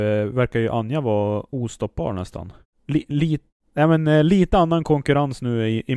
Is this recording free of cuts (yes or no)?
yes